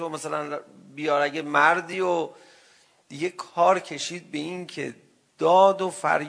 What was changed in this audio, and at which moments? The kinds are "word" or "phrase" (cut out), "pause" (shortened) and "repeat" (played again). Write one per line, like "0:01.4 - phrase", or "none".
none

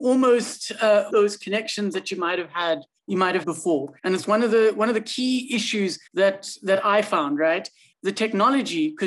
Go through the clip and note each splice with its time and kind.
0:01.1 - word
0:03.0 - pause
0:03.4 - word
0:04.0 - pause
0:06.1 - pause
0:07.9 - phrase

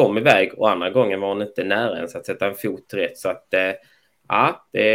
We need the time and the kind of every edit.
none

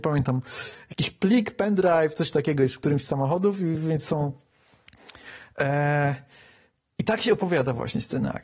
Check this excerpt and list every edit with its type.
none

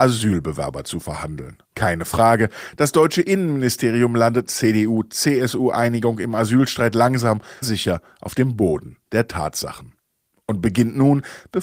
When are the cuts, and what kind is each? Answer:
0:01.6 - pause
0:04.5 - phrase
0:07.6 - word

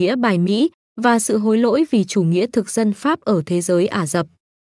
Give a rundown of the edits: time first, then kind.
none

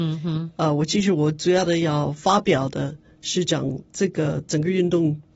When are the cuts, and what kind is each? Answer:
none

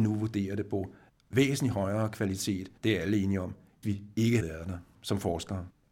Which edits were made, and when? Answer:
0:01.1 - word
0:02.8 - pause
0:03.8 - phrase
0:04.4 - word

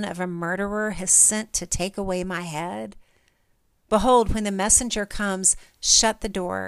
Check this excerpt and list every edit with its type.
none

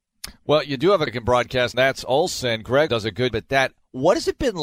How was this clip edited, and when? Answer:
0:01.1 - word
0:01.7 - phrase
0:02.9 - word
0:03.3 - word

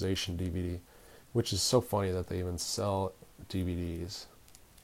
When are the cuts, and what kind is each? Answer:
none

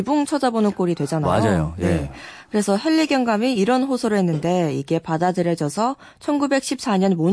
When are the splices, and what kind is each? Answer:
none

